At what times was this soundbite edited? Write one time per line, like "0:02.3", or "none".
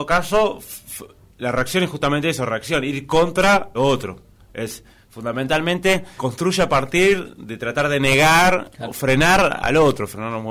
0:03.7
0:06.2